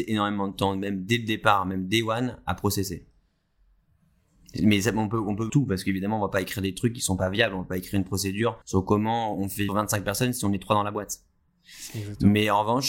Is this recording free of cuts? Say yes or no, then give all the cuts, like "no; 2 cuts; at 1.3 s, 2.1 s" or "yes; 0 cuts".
no; 3 cuts; at 5.5 s, 8.6 s, 9.7 s